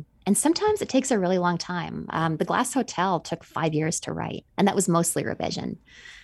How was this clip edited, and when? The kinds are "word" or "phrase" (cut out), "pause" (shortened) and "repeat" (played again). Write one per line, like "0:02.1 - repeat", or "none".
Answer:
0:04.5 - pause